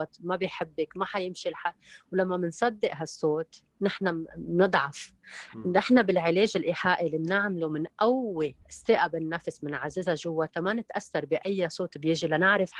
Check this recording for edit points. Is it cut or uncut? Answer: cut